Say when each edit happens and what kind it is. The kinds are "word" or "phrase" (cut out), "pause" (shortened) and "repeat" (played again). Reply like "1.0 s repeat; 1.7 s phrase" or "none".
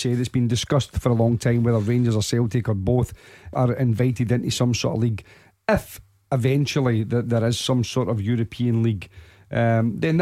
3.5 s word